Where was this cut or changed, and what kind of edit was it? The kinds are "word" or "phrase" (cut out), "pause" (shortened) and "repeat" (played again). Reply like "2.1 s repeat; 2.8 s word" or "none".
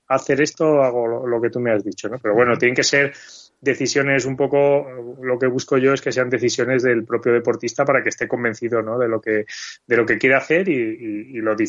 none